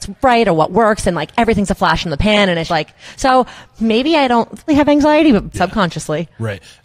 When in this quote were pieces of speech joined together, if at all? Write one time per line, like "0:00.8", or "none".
0:02.7
0:04.7
0:05.5